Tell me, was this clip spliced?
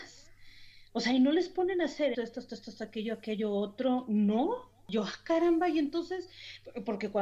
yes; 1 cut; at 2.1 s

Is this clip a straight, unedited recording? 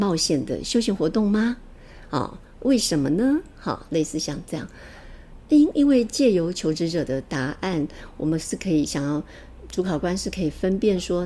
yes; 0 cuts

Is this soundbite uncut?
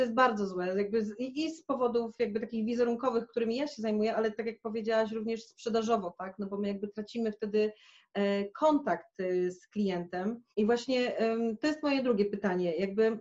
no; 1 cut; at 10.5 s

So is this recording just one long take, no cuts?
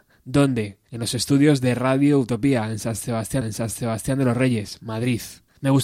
no; 1 cut; at 3.4 s

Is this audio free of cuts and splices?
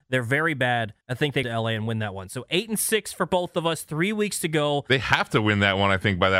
no; 2 cuts; at 1.0 s, 1.4 s

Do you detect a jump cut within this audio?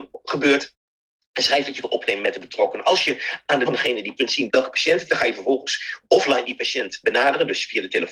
yes; 6 cuts; at 1.8 s, 3.7 s, 4.2 s, 4.5 s, 5.1 s, 7.0 s

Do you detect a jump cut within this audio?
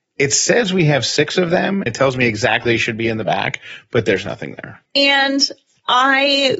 yes; 3 cuts; at 1.9 s, 2.7 s, 4.9 s

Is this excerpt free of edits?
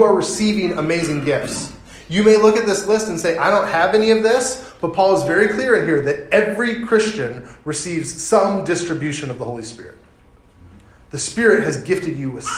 yes; 0 cuts

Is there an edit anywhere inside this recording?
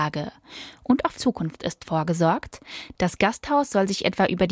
yes; 1 cut; at 1.2 s

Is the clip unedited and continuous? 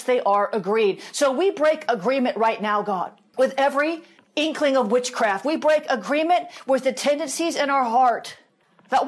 yes; 0 cuts

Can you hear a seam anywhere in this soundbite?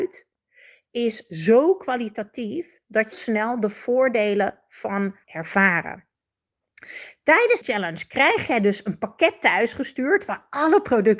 yes; 3 cuts; at 3.1 s, 5.2 s, 7.6 s

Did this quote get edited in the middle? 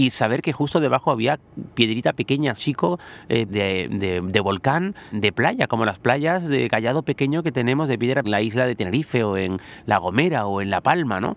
yes; 4 cuts; at 2.6 s, 3.5 s, 5.1 s, 8.2 s

